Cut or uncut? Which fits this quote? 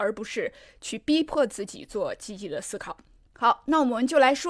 uncut